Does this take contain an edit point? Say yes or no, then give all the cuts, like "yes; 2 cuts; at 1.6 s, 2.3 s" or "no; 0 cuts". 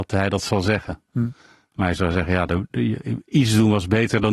no; 0 cuts